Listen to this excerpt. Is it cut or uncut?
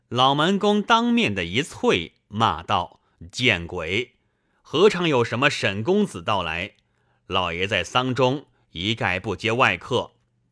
uncut